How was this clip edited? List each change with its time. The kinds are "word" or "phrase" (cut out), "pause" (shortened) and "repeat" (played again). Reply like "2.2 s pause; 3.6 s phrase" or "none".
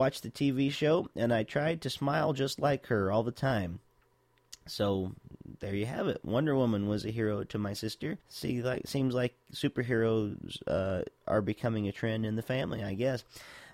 8.2 s pause